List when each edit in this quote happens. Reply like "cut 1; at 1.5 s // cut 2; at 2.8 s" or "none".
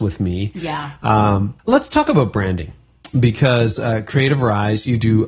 cut 1; at 1.6 s